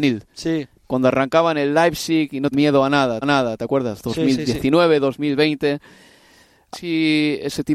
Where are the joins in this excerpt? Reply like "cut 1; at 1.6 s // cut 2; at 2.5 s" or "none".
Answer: cut 1; at 2.5 s // cut 2; at 3.2 s // cut 3; at 6.7 s